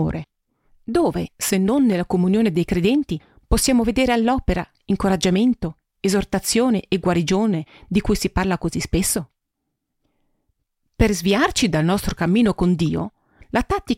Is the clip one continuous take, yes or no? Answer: yes